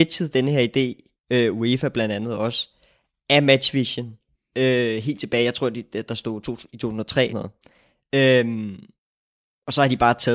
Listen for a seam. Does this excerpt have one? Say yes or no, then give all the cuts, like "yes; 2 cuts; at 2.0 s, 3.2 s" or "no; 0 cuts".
yes; 1 cut; at 7.3 s